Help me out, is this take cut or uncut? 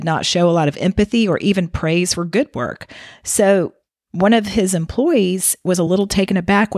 uncut